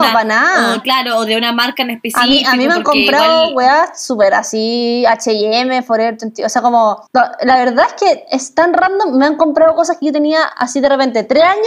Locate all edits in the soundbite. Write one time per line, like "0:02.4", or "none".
0:07.1